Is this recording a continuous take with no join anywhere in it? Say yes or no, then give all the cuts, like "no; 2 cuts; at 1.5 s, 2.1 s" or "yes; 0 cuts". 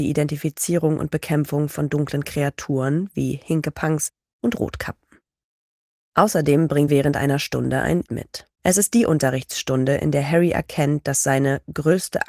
no; 3 cuts; at 6.9 s, 8.1 s, 8.5 s